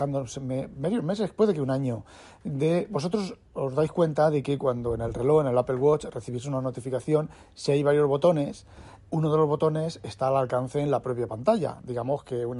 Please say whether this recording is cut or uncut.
cut